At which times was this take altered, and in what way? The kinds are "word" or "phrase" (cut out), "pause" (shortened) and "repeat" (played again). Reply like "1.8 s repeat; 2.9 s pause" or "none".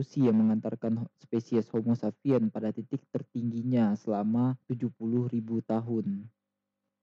4.6 s pause